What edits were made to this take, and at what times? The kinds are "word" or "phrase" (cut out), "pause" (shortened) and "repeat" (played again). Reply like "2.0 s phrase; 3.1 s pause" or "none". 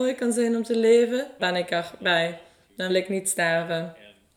1.4 s word; 2.9 s word